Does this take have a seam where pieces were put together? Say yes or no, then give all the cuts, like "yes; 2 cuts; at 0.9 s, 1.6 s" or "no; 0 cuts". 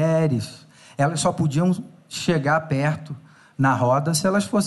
no; 0 cuts